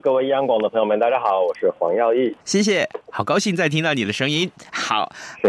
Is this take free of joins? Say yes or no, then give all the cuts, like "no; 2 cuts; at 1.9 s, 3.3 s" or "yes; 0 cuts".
no; 1 cut; at 2.4 s